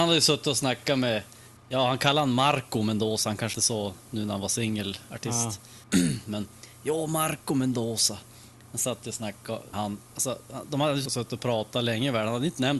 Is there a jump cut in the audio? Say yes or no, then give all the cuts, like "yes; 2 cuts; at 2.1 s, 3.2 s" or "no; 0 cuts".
yes; 5 cuts; at 1.6 s, 3.5 s, 5.8 s, 9.7 s, 11.1 s